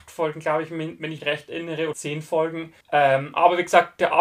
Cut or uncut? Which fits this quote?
cut